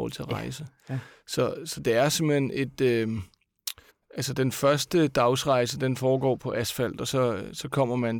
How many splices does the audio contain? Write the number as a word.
one